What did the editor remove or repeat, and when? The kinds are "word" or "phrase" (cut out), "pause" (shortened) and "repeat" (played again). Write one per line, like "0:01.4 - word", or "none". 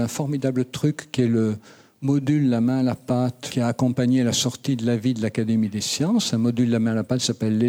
none